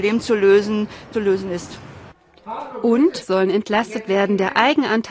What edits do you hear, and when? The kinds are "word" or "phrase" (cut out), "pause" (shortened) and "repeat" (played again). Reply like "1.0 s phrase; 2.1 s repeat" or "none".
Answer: 1.1 s phrase; 3.2 s word